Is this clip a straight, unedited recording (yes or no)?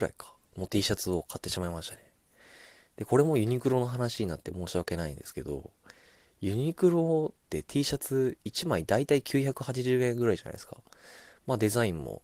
yes